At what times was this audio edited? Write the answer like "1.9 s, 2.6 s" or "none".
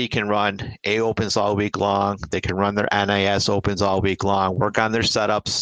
none